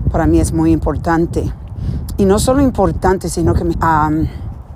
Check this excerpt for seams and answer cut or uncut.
cut